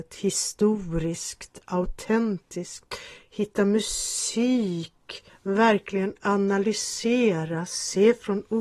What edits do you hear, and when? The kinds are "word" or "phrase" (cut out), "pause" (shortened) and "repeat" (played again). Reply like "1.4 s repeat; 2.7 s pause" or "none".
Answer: 5.3 s pause